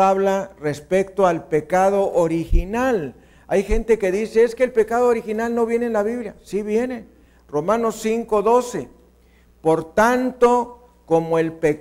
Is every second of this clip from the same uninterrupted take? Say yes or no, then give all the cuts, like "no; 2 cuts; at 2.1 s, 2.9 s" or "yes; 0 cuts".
yes; 0 cuts